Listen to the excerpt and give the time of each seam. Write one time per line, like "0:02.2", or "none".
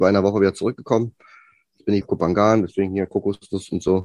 0:02.0